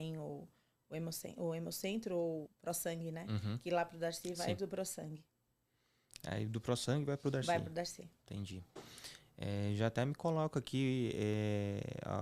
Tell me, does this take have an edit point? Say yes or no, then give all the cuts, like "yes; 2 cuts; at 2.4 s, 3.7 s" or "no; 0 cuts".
yes; 1 cut; at 2.5 s